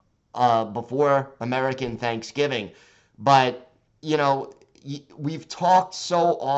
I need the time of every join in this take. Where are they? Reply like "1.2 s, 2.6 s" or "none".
3.9 s